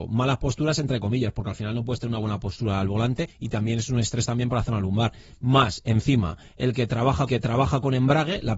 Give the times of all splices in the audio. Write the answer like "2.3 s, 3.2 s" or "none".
3.3 s, 7.3 s